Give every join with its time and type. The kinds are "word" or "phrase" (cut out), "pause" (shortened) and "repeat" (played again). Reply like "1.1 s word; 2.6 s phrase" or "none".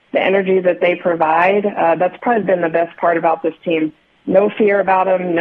none

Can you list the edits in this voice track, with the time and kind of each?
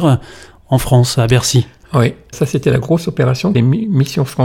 2.3 s word; 3.5 s phrase

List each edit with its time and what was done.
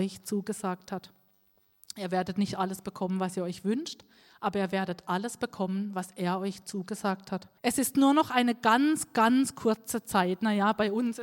7.6 s pause

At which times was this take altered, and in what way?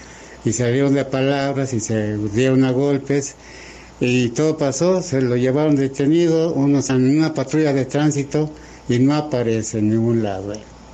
6.9 s word

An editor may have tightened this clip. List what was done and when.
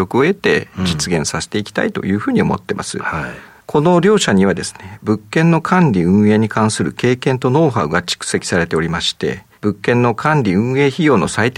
9.5 s pause

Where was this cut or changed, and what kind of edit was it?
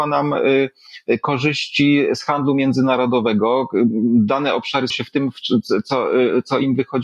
4.9 s word

